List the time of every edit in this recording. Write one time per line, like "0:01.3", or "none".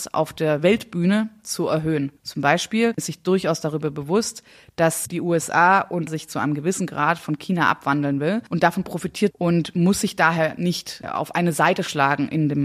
0:03.0
0:06.1
0:09.3